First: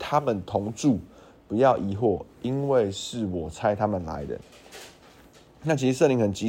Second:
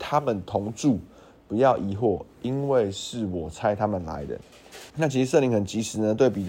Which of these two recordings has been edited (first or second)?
second